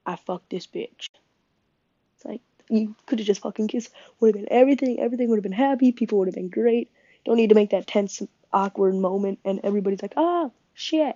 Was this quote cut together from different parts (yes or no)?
no